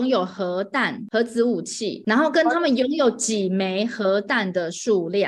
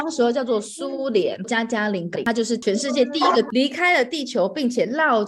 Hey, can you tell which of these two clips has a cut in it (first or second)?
second